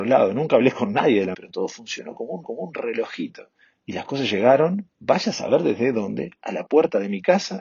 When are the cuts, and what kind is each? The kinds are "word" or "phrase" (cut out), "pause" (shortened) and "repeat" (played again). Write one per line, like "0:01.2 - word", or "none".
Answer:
0:01.3 - word
0:02.4 - repeat